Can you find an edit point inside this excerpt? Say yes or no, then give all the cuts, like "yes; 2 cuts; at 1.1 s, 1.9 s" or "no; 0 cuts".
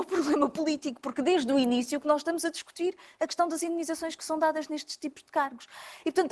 no; 0 cuts